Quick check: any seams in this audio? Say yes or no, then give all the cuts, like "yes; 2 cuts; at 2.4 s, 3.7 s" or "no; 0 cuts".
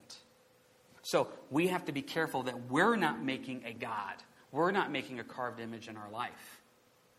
no; 0 cuts